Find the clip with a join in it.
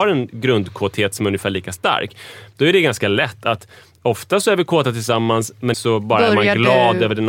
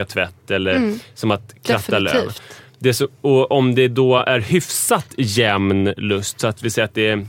first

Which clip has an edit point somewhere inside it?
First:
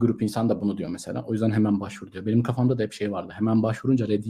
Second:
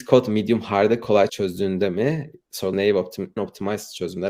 second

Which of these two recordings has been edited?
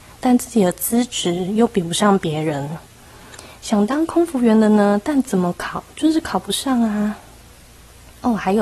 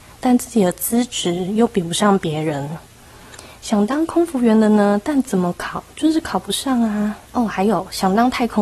second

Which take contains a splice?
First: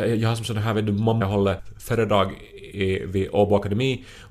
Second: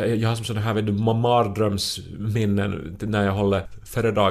first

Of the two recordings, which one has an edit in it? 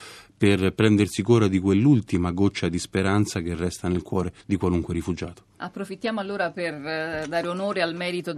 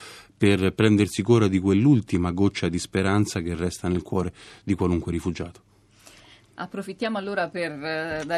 first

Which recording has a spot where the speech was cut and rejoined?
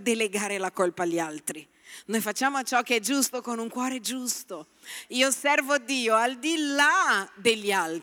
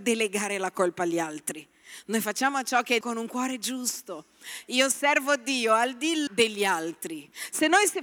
second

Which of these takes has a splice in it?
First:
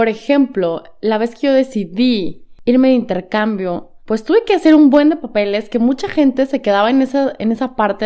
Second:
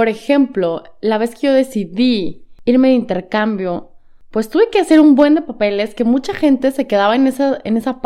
first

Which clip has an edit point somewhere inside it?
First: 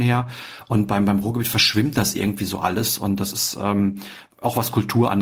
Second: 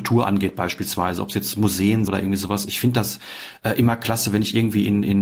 second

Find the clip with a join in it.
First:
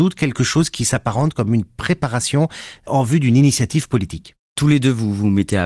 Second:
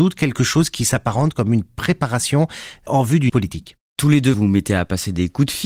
second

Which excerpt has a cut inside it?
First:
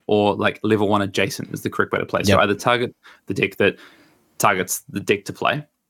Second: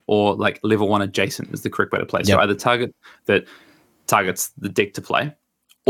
second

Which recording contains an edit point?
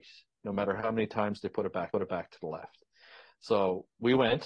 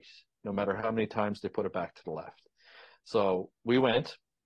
first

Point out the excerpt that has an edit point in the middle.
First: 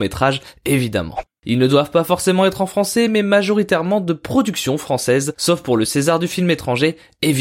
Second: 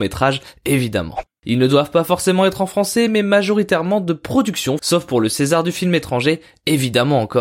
second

